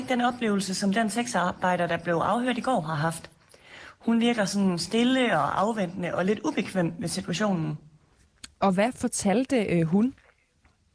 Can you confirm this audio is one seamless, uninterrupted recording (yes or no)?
yes